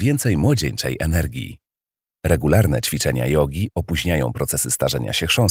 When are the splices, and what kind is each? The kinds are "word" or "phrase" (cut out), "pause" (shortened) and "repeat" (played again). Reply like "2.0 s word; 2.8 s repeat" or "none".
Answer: none